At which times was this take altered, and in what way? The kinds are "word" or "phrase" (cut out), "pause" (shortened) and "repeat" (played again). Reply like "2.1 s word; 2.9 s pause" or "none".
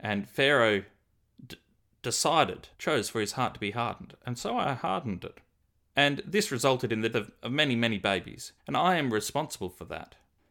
2.7 s pause; 7.1 s word; 8.6 s pause